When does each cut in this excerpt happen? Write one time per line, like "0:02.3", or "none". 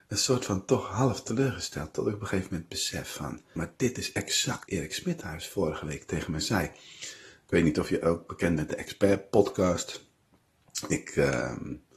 0:03.6
0:04.7
0:08.6